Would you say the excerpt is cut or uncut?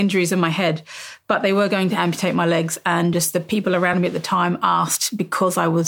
uncut